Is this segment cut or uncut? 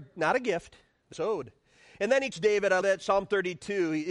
cut